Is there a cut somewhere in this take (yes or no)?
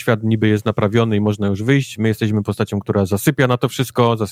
no